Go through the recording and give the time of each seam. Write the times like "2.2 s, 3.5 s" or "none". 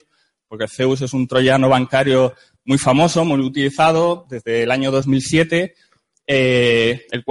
none